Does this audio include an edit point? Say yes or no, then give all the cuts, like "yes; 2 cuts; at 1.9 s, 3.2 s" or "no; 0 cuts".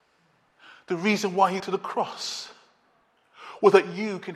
yes; 1 cut; at 1.6 s